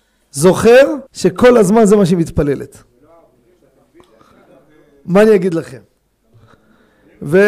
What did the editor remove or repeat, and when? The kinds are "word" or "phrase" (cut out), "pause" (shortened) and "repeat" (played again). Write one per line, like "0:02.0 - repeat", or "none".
0:01.1 - pause